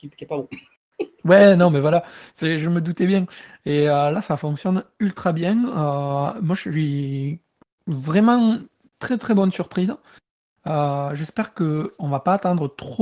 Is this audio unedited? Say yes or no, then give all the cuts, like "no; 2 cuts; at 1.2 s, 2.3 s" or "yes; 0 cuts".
yes; 0 cuts